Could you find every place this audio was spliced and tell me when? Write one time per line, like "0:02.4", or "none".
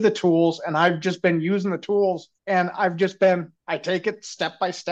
0:02.3
0:03.6